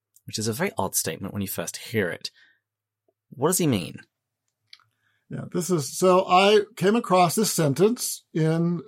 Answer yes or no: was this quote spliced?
no